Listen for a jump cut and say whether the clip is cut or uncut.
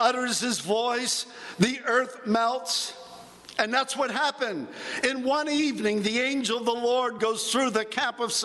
uncut